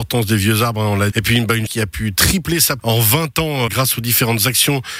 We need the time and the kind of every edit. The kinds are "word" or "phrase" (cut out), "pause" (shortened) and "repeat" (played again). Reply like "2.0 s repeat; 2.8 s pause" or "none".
1.1 s word; 1.7 s word; 2.8 s word; 3.7 s word